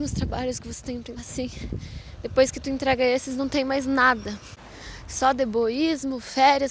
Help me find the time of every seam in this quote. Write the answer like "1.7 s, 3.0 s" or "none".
1.2 s